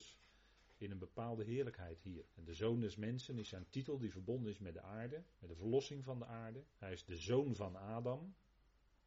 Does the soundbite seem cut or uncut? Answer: cut